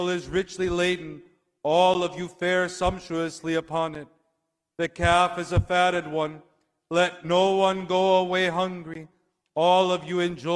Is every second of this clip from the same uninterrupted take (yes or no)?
yes